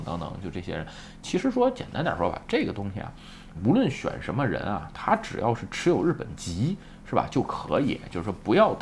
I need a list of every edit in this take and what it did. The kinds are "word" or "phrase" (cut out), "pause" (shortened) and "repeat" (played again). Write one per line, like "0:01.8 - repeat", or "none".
0:03.5 - word